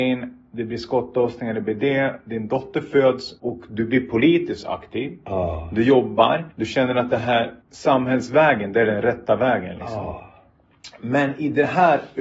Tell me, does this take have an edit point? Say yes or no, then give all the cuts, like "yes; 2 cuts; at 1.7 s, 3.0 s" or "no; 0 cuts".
yes; 3 cuts; at 3.4 s, 6.5 s, 7.6 s